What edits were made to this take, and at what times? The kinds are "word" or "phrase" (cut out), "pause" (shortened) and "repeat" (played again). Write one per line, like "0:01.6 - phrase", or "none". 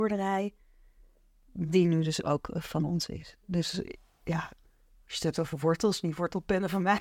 none